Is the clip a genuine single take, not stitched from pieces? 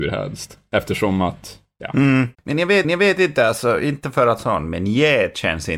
no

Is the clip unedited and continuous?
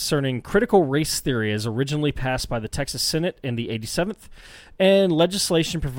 yes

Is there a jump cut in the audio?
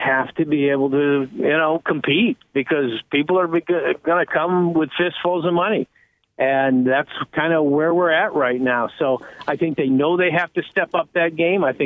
no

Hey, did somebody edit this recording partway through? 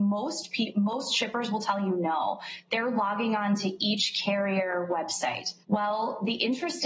yes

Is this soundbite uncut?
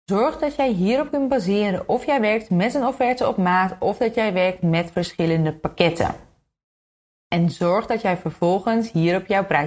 yes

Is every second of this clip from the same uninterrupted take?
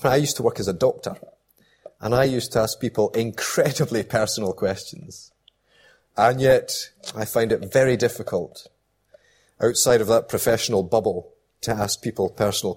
yes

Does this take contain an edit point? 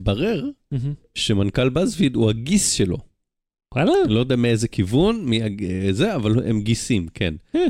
no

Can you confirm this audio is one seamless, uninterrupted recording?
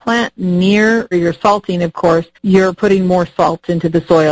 no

